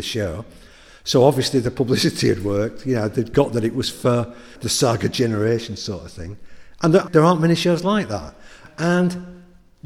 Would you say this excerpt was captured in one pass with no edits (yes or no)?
yes